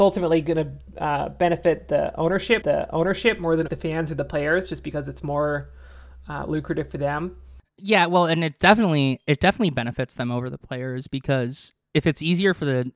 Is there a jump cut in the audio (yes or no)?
yes